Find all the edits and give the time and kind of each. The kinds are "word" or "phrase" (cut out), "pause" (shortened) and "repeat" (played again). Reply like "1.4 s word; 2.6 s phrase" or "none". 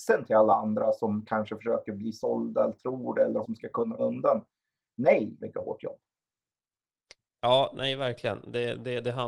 3.4 s word; 4.0 s word; 5.4 s phrase